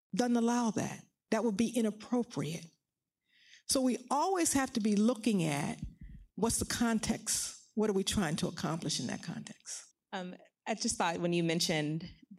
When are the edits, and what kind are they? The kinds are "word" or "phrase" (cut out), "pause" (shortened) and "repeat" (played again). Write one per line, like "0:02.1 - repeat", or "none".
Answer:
0:06.3 - pause
0:09.9 - pause